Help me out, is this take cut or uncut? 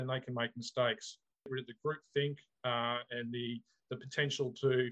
uncut